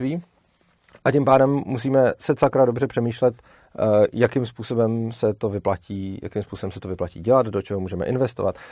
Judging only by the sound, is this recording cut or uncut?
uncut